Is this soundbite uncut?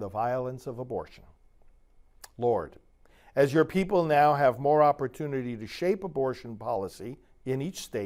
yes; 0 cuts

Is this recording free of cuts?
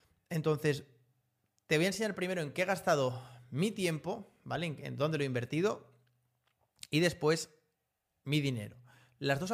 yes; 0 cuts

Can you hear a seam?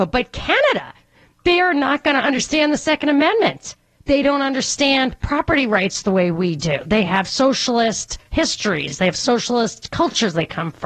no; 0 cuts

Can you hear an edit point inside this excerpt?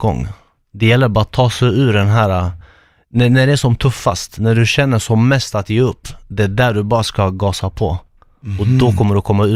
no; 0 cuts

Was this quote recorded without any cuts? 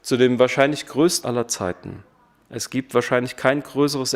no; 1 cut; at 1.2 s

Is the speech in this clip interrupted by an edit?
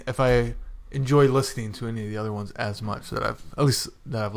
no; 0 cuts

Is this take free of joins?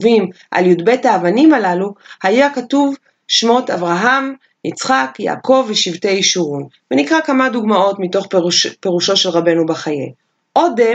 yes; 0 cuts

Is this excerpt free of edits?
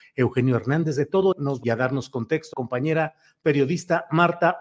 no; 3 cuts; at 1.3 s, 1.6 s, 2.5 s

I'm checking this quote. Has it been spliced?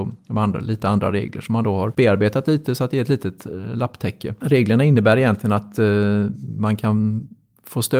no; 0 cuts

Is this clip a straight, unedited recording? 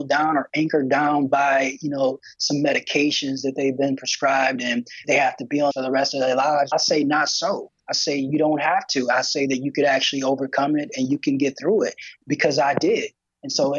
no; 4 cuts; at 5.0 s, 5.7 s, 6.7 s, 7.8 s

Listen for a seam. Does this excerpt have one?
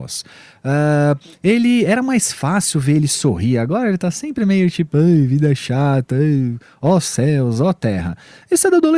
no; 0 cuts

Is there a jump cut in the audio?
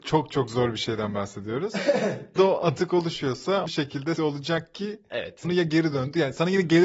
yes; 4 cuts; at 2.4 s, 3.7 s, 4.2 s, 5.4 s

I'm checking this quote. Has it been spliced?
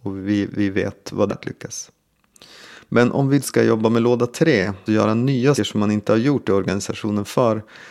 yes; 4 cuts; at 1.3 s, 3.4 s, 4.9 s, 5.6 s

